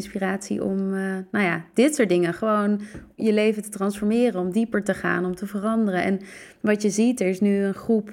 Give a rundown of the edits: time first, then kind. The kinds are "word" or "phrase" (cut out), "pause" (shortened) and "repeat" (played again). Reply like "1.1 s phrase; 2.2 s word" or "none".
3.2 s word